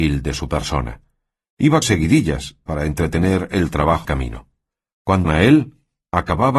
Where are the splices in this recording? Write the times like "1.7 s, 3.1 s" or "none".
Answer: 1.8 s, 4.0 s, 5.2 s